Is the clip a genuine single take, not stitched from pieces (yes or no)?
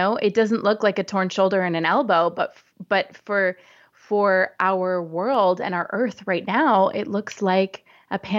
yes